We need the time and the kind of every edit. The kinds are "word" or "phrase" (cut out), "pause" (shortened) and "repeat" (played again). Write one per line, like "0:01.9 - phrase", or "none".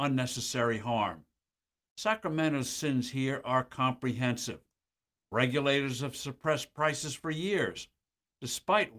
none